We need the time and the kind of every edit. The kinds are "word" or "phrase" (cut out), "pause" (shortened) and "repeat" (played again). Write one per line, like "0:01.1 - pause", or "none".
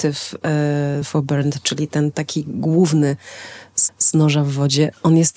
0:01.0 - phrase
0:03.9 - repeat